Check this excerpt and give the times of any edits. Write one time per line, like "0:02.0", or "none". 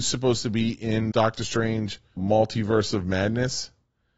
0:01.1
0:02.2

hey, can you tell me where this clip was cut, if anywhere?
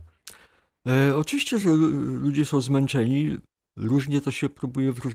none

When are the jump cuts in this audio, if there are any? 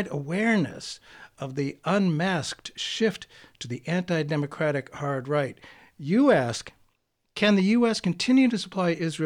none

